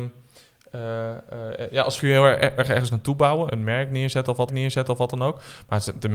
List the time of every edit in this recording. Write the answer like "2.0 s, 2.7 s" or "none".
2.0 s, 2.6 s, 3.5 s, 4.5 s